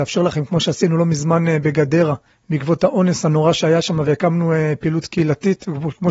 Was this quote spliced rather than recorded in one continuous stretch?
yes; 1 cut; at 2.3 s

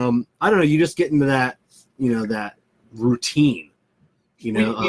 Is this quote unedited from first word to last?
yes; 0 cuts

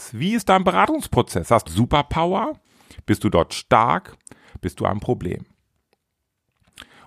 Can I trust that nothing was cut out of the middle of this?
no; 2 cuts; at 1.7 s, 4.8 s

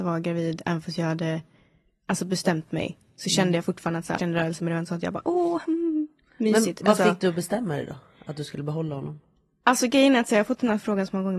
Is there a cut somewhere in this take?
yes; 1 cut; at 4.2 s

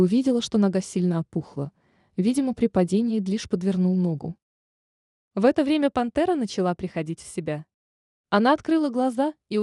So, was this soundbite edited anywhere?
no; 0 cuts

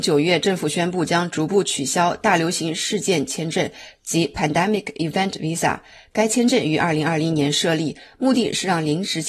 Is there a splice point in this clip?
no; 0 cuts

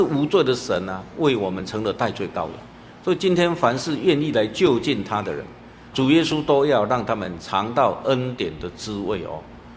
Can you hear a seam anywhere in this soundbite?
yes; 1 cut; at 5.9 s

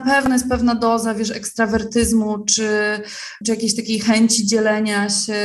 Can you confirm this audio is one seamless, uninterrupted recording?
no; 1 cut; at 3.4 s

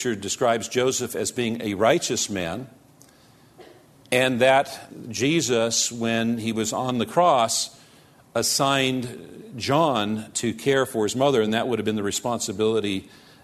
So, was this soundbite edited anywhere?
no; 0 cuts

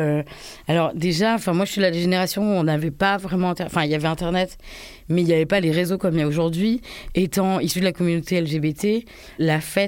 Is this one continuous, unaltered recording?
yes; 0 cuts

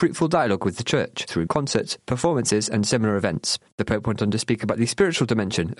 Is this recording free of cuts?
no; 1 cut; at 1.5 s

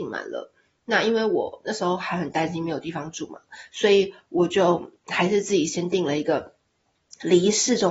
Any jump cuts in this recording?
yes; 1 cut; at 5.0 s

